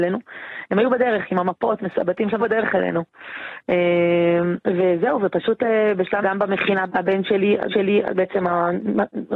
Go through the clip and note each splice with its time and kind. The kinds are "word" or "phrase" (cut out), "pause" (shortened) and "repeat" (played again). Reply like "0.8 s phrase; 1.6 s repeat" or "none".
2.4 s phrase; 4.6 s pause; 6.2 s word; 6.9 s word; 7.7 s repeat